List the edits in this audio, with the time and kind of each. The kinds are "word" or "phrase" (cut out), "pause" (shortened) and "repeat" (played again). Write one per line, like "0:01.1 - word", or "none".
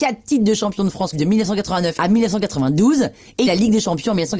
0:01.1 - word
0:03.5 - word